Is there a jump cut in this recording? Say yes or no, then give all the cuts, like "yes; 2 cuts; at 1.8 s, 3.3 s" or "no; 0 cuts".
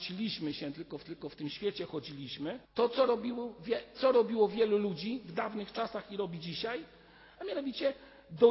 yes; 2 cuts; at 1.0 s, 2.6 s